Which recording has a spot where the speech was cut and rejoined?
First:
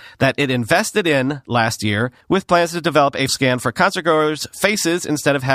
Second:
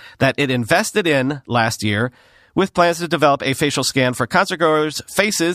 first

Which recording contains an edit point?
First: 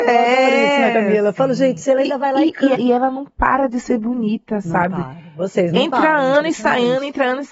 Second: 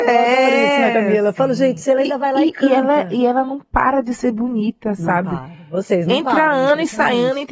first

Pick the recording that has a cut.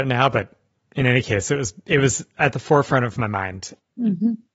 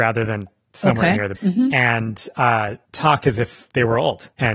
second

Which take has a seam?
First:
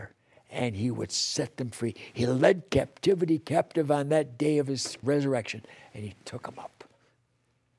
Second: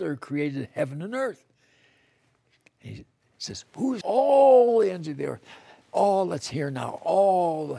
second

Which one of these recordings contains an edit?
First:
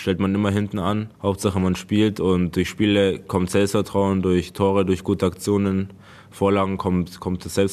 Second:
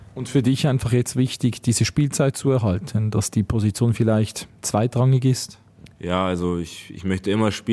first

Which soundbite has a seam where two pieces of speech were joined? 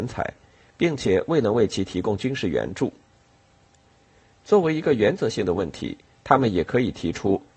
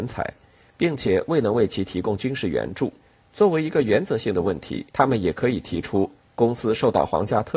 second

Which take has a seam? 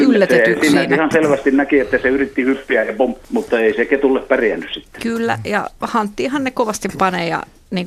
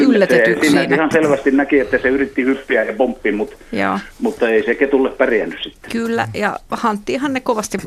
first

